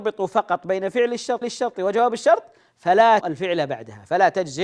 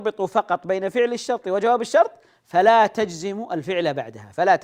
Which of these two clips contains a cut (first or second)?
first